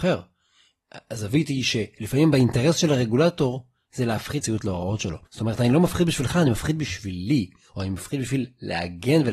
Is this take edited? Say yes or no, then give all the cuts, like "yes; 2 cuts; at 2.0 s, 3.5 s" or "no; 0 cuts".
yes; 2 cuts; at 4.4 s, 5.3 s